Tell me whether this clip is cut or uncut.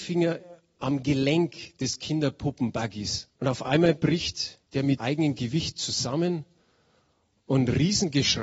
cut